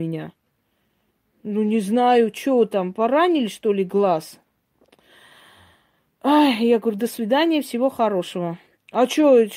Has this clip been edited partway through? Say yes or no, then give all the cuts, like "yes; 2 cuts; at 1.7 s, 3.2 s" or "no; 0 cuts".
no; 0 cuts